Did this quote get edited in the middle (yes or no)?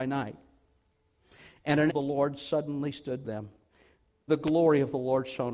yes